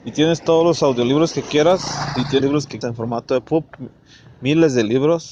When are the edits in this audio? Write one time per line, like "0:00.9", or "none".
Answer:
0:02.4
0:02.8